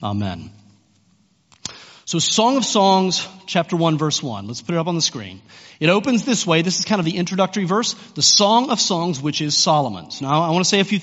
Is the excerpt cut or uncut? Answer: uncut